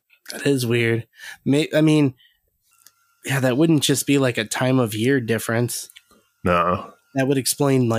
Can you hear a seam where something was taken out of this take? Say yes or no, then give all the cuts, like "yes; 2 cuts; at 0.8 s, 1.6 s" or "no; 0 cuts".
no; 0 cuts